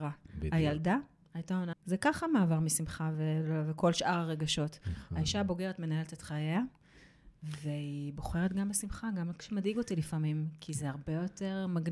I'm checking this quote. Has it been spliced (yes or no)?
yes